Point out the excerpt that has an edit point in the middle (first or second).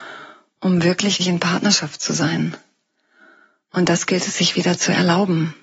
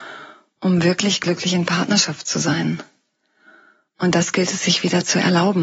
first